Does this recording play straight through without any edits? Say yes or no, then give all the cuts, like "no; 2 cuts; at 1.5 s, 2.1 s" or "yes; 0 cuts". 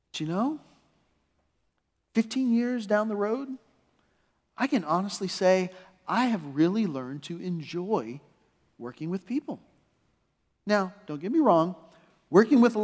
yes; 0 cuts